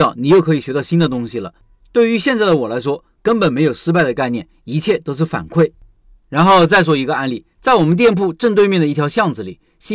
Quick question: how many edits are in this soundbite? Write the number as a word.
one